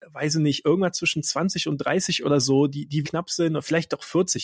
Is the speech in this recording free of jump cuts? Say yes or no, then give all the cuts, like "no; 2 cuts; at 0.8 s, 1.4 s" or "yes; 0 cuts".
no; 1 cut; at 3.0 s